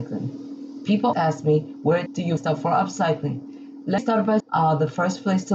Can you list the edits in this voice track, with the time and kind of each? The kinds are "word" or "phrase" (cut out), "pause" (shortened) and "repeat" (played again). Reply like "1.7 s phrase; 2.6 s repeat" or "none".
1.1 s word; 2.1 s word; 2.4 s word; 4.0 s word; 4.4 s word